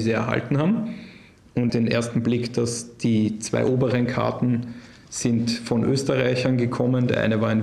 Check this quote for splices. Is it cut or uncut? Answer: cut